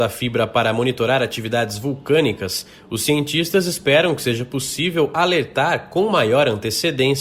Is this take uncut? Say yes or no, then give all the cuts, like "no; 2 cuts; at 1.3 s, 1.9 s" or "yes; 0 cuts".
yes; 0 cuts